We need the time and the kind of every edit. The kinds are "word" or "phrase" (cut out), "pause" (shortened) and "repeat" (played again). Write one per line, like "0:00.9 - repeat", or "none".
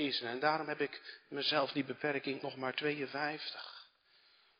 0:02.4 - word